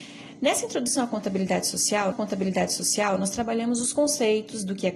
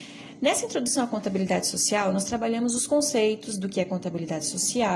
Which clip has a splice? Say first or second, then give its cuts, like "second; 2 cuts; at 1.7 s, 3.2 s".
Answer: first; 1 cut; at 2.1 s